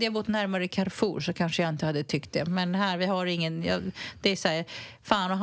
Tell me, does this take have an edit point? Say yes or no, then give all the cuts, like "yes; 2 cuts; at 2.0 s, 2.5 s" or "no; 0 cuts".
no; 0 cuts